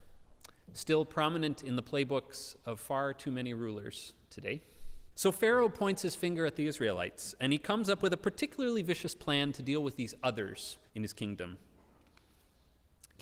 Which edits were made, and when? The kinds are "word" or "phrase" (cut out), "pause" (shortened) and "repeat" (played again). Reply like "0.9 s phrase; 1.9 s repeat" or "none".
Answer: 5.1 s pause; 10.9 s pause